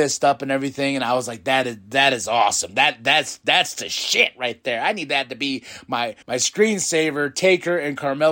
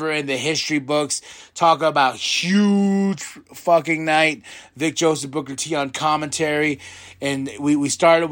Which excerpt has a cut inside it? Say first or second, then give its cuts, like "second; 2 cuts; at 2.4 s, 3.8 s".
first; 1 cut; at 6.2 s